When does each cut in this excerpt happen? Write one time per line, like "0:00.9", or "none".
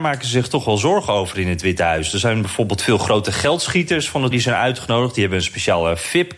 0:04.3